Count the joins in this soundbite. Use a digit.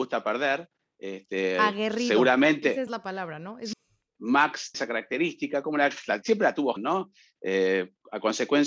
5